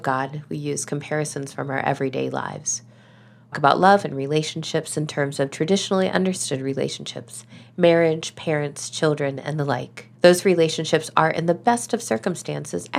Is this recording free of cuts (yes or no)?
no